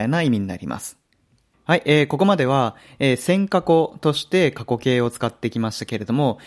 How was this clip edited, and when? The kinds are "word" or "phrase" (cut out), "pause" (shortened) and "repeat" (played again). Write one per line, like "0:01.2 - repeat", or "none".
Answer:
none